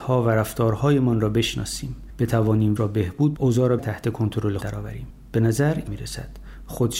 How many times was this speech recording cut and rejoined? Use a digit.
5